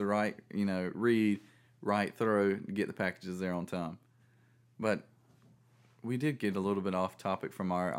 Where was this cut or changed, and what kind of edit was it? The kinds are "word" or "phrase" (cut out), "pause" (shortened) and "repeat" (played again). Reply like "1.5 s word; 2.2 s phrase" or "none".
none